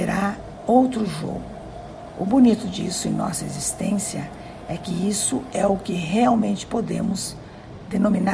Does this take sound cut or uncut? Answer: uncut